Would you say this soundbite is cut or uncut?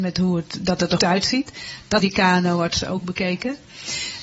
cut